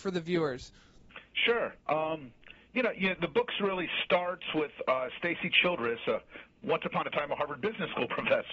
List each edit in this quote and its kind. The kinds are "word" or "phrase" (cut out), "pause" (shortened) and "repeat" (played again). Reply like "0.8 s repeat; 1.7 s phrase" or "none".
1.8 s pause